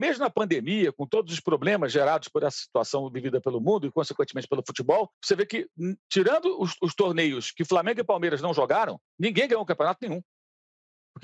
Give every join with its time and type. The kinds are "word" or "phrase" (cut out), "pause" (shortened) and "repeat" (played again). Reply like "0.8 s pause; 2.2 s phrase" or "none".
5.1 s pause; 6.0 s pause; 9.1 s pause